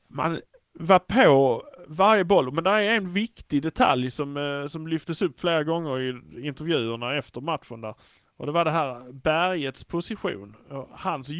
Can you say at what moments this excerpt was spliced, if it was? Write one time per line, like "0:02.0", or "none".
none